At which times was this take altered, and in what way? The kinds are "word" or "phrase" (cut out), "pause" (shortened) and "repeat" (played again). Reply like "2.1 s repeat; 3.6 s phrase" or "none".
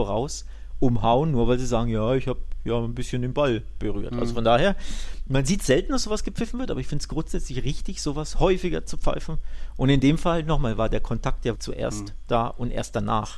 11.6 s word